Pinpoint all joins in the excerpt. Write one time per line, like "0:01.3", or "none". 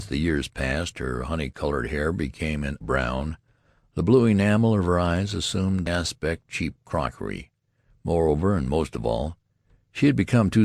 0:02.8
0:05.9
0:06.5